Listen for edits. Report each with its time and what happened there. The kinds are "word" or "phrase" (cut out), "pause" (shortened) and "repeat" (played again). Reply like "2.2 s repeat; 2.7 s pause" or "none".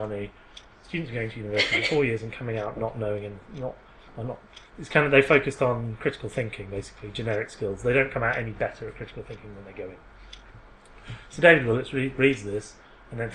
4.7 s pause